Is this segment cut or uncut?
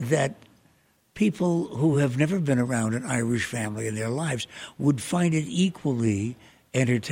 uncut